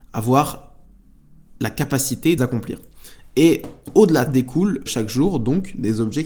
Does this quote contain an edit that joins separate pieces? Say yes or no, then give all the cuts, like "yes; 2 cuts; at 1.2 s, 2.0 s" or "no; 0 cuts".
yes; 3 cuts; at 2.4 s, 4.3 s, 4.9 s